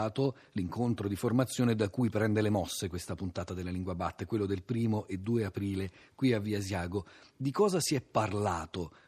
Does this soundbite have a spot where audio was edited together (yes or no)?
no